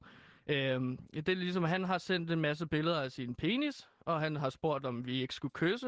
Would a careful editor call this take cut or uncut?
uncut